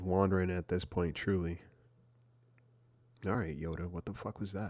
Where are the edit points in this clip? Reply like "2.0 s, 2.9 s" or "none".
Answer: none